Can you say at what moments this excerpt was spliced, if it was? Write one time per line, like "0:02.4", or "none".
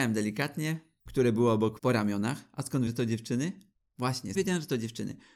0:01.1
0:01.8
0:02.9
0:04.3